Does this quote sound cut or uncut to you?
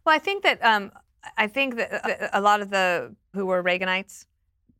cut